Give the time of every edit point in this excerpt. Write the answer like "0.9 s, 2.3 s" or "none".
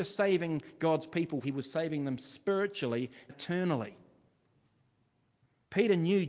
1.4 s, 3.3 s

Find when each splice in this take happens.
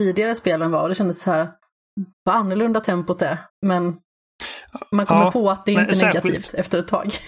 2.1 s, 3.5 s

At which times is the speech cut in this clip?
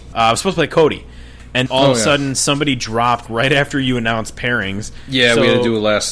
1.7 s, 3.3 s

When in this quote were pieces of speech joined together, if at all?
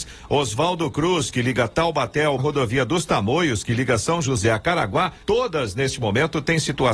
2.4 s, 5.2 s

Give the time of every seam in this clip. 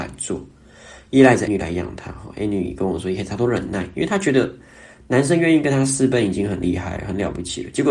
1.5 s

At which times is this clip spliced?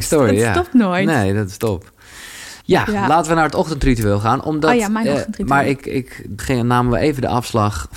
2.6 s, 5.8 s, 6.4 s

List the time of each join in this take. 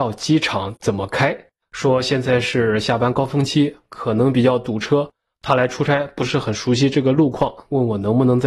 1.6 s

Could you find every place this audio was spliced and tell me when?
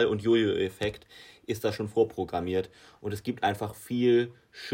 none

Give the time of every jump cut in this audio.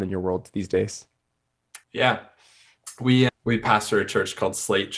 1.8 s, 3.3 s

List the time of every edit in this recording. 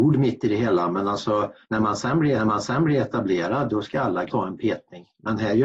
1.6 s, 2.4 s, 4.3 s

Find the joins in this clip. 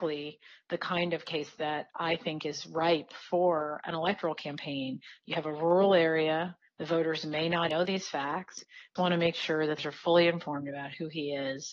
7.7 s, 9.0 s, 9.8 s

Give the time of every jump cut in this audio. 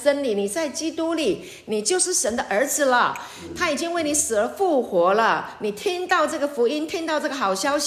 none

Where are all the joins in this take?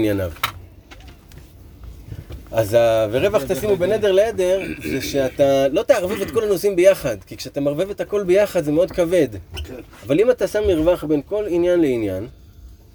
none

